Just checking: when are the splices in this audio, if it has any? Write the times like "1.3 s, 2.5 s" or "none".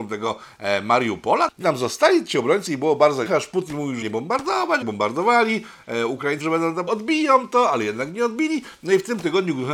1.6 s, 2.7 s, 3.2 s, 4.0 s, 4.8 s, 6.4 s, 6.9 s